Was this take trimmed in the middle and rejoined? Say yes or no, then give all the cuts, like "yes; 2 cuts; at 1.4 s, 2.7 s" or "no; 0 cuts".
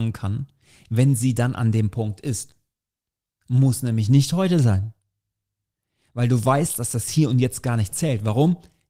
no; 0 cuts